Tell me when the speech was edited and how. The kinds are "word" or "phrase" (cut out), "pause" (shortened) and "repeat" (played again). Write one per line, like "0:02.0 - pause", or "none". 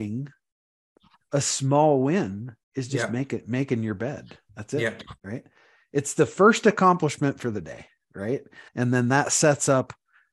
0:02.6 - pause
0:04.5 - pause
0:05.2 - pause
0:08.7 - pause